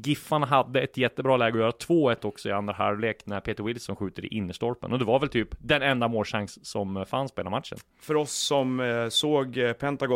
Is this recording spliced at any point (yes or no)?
no